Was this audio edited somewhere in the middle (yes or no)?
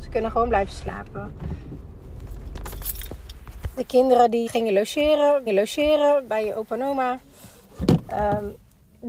yes